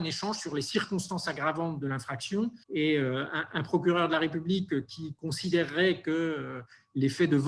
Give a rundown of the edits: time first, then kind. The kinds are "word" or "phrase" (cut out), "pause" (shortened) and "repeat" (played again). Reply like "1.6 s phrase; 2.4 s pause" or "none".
2.6 s pause